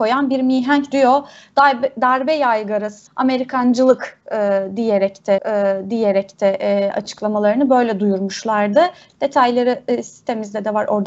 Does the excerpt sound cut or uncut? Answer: cut